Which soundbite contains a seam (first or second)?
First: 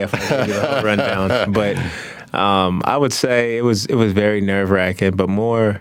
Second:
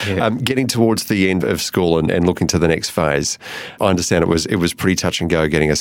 second